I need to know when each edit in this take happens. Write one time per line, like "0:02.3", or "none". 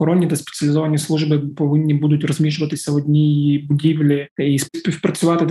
none